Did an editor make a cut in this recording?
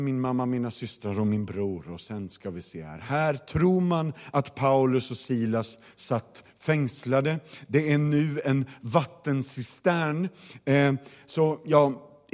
no; 0 cuts

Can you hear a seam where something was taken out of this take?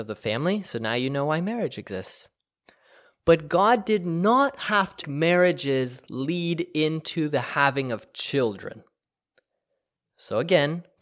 yes; 1 cut; at 5.0 s

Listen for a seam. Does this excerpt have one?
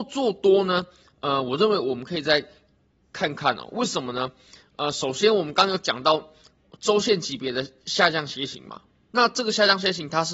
no; 0 cuts

